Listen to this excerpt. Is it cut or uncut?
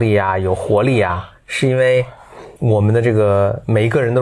cut